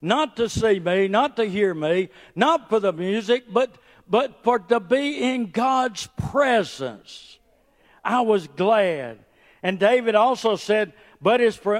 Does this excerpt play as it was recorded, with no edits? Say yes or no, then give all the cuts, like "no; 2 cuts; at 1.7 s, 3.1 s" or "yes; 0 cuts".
yes; 0 cuts